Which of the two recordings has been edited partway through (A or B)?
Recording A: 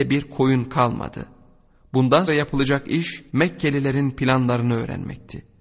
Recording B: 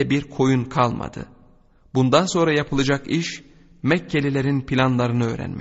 A